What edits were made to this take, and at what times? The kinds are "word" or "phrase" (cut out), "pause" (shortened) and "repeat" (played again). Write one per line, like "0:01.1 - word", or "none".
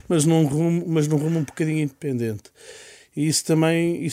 none